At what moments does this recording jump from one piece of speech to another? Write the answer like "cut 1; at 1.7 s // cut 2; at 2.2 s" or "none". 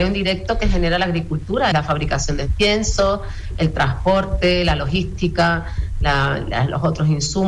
cut 1; at 1.7 s